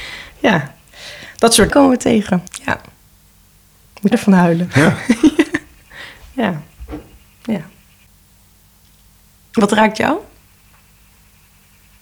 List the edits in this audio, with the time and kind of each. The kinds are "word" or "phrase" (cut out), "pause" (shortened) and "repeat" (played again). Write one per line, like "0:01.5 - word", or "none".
0:01.7 - word
0:02.5 - pause
0:04.1 - word